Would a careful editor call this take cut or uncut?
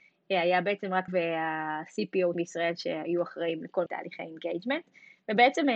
cut